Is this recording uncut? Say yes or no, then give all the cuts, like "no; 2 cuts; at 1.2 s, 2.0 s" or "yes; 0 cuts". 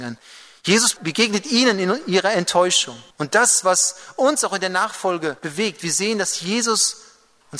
no; 2 cuts; at 3.1 s, 5.4 s